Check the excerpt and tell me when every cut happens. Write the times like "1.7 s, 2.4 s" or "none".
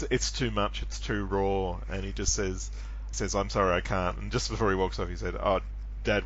3.1 s